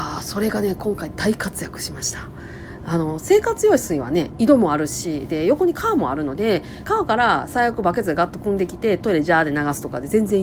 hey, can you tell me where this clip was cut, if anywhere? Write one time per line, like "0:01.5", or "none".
0:06.8